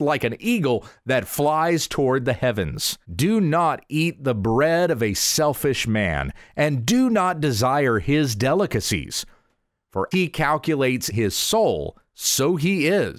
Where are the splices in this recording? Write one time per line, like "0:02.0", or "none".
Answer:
0:03.0
0:10.1
0:11.1